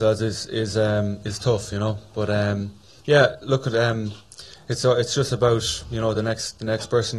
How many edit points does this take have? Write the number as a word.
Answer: zero